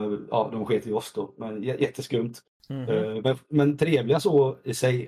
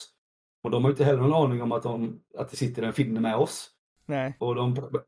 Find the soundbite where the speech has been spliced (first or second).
first